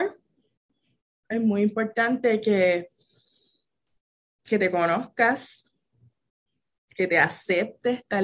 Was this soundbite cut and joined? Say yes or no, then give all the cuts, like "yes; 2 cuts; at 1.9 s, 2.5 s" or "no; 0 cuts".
no; 0 cuts